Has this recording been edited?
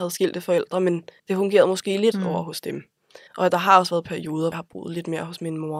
yes; 4 cuts; at 1.2 s, 2.1 s, 3.3 s, 4.5 s

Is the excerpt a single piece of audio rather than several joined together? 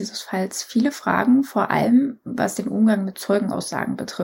yes; 0 cuts

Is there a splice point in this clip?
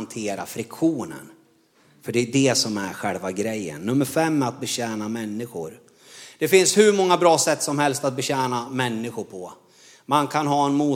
no; 0 cuts

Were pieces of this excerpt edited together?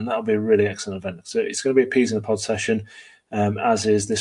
no; 0 cuts

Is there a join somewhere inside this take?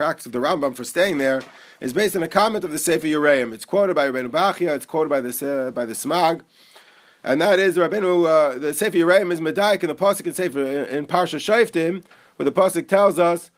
no; 0 cuts

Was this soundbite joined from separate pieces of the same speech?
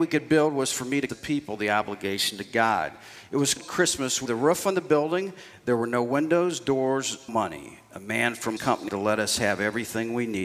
yes; 6 cuts; at 1.1 s, 3.6 s, 4.3 s, 7.3 s, 8.6 s, 8.9 s

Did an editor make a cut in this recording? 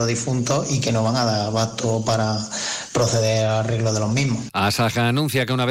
no; 0 cuts

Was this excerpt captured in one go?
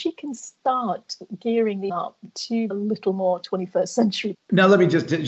no; 3 cuts; at 1.9 s, 2.7 s, 4.3 s

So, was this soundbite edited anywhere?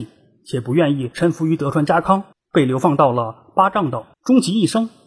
yes; 2 cuts; at 2.3 s, 4.1 s

